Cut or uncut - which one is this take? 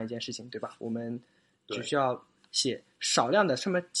uncut